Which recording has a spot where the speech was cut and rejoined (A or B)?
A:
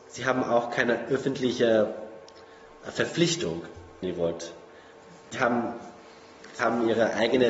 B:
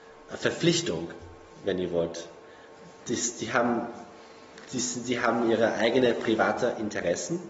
A